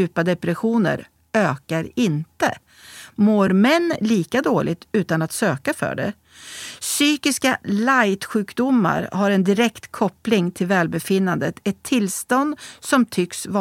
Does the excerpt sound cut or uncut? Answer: uncut